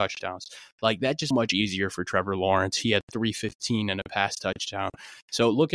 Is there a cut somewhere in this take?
yes; 1 cut; at 1.3 s

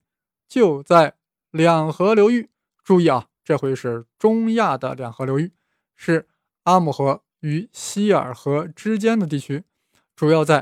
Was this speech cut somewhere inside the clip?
no; 0 cuts

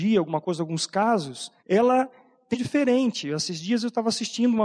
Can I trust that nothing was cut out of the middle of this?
no; 2 cuts; at 1.6 s, 2.5 s

